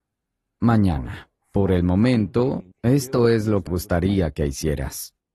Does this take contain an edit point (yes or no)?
yes